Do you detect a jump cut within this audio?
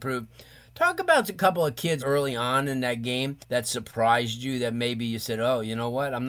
yes; 2 cuts; at 2.0 s, 3.4 s

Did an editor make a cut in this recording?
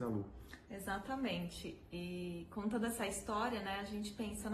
no; 0 cuts

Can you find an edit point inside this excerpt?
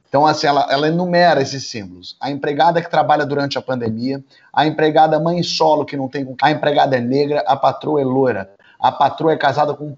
yes; 1 cut; at 6.4 s

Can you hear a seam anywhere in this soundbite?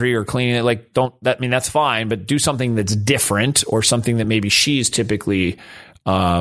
no; 0 cuts

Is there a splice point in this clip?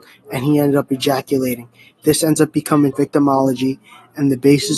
yes; 1 cut; at 2.9 s

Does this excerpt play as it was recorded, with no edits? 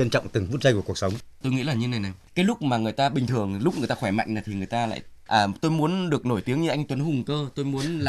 yes; 0 cuts

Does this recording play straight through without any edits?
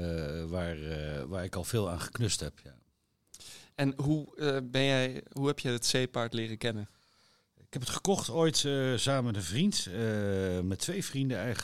yes; 0 cuts

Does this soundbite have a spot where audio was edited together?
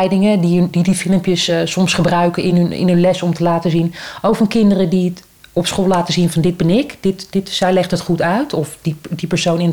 no; 0 cuts

